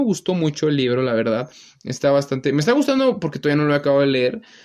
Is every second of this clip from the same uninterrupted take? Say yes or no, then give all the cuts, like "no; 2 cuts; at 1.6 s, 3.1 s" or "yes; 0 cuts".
yes; 0 cuts